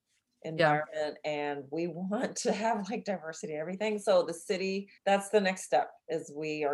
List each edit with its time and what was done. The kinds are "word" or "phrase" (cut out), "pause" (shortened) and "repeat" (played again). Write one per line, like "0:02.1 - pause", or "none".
0:05.0 - pause